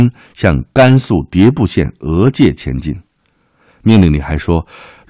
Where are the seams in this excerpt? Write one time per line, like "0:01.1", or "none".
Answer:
none